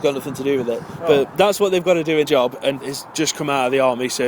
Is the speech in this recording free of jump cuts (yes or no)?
no